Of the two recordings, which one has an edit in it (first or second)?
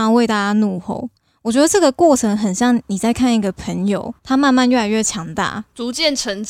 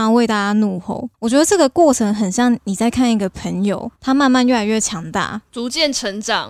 second